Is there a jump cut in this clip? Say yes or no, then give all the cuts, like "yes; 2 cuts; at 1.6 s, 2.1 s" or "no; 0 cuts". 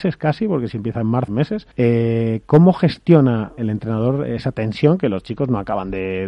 yes; 3 cuts; at 1.3 s, 1.7 s, 3.6 s